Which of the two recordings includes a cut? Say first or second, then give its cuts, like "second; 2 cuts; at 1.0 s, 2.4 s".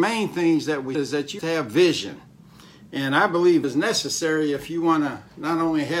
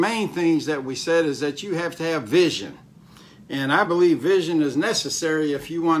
first; 3 cuts; at 0.9 s, 1.4 s, 3.6 s